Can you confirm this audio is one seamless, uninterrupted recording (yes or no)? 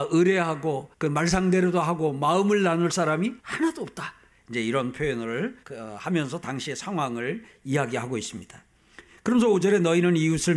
no